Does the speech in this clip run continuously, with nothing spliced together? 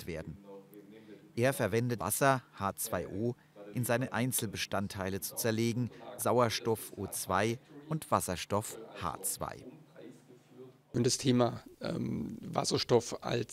no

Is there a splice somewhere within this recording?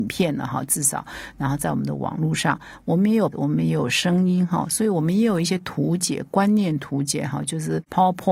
yes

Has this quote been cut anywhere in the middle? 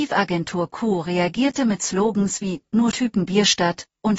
yes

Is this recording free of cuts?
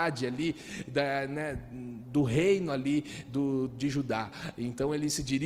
yes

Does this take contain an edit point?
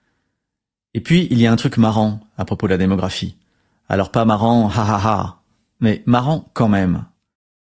no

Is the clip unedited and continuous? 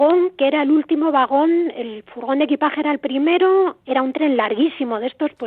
yes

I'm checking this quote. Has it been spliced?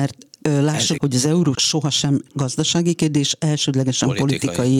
yes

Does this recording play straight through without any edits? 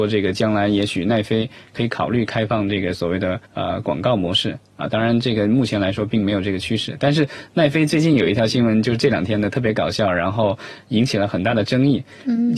no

